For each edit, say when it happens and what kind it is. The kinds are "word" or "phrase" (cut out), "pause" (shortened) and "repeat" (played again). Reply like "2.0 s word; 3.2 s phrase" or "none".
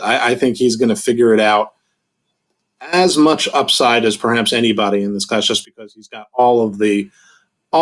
none